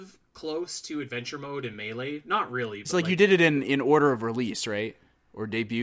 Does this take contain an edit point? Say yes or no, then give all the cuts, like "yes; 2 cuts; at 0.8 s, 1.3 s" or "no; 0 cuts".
no; 0 cuts